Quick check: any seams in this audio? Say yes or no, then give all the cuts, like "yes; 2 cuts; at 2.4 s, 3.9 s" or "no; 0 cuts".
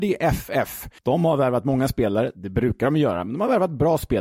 yes; 1 cut; at 1.0 s